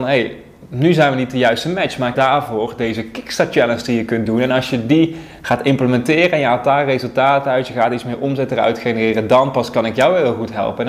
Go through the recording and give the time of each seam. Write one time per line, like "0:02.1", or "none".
0:02.1